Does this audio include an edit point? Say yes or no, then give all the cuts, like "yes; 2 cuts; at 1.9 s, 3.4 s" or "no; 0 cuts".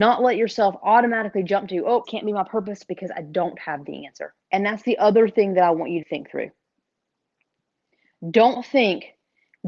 yes; 3 cuts; at 2.0 s, 4.4 s, 6.0 s